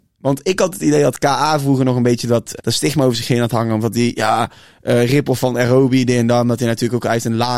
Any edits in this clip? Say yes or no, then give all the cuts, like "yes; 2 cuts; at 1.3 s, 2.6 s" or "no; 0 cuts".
yes; 1 cut; at 2.6 s